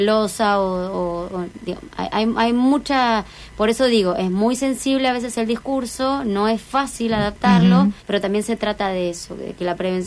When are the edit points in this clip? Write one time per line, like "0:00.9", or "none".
0:08.0